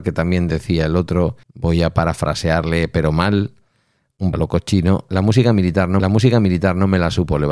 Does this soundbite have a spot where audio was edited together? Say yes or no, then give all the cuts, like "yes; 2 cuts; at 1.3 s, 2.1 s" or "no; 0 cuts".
yes; 4 cuts; at 1.4 s, 4.3 s, 5.1 s, 6.0 s